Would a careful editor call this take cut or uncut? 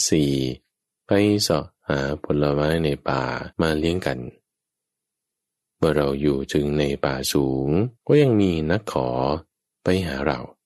cut